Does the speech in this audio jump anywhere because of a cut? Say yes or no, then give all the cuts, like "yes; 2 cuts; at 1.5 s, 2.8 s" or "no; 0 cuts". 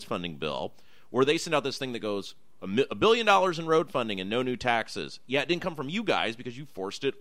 no; 0 cuts